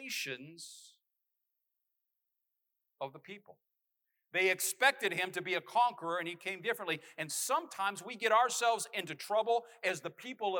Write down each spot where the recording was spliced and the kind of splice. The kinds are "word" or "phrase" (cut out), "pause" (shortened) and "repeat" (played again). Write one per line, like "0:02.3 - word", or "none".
0:03.8 - pause